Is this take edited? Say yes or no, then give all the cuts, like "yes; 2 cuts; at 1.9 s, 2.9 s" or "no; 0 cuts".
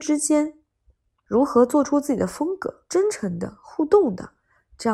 yes; 1 cut; at 2.9 s